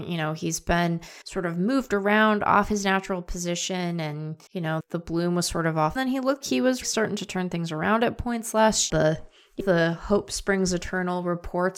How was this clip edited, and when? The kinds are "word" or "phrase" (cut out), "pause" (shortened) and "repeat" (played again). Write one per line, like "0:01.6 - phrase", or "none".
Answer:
0:01.2 - pause
0:04.5 - pause
0:04.8 - word
0:06.0 - phrase
0:06.4 - word
0:06.8 - word
0:08.9 - phrase
0:09.6 - word

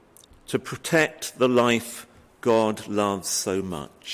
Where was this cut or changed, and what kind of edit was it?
none

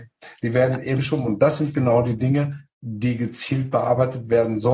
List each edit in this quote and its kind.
0:01.0 - word
0:02.7 - pause

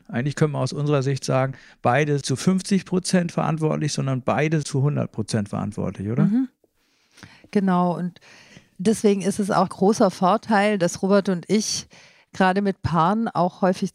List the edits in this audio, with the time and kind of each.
0:02.2 - phrase
0:04.6 - word
0:09.7 - phrase

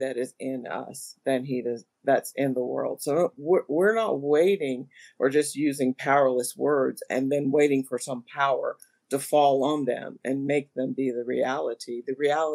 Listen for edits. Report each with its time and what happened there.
none

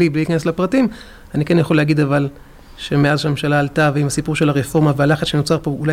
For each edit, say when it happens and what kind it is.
none

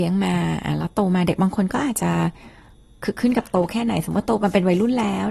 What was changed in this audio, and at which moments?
none

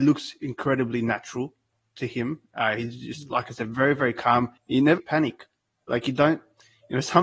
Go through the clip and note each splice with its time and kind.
0:04.6 - pause
0:05.0 - word

